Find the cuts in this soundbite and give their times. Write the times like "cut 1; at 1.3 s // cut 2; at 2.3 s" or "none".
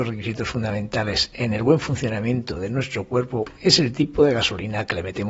none